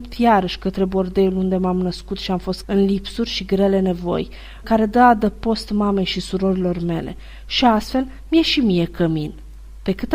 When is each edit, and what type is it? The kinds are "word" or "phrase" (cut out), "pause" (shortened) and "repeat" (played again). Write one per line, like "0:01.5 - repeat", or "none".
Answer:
0:02.6 - word
0:04.6 - word